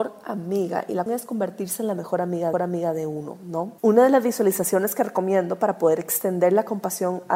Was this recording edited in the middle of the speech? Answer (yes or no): yes